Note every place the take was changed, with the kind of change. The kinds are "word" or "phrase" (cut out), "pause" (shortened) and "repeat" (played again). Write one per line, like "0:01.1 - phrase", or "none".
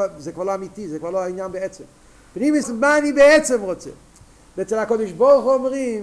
0:02.6 - word